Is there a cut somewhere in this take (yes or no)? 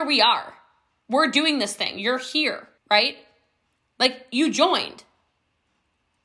yes